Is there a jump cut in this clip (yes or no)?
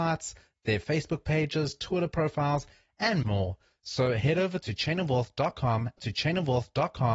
yes